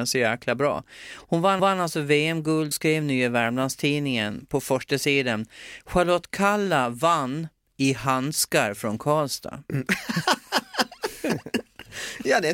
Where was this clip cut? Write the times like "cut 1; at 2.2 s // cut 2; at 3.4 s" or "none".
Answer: cut 1; at 1.6 s // cut 2; at 2.7 s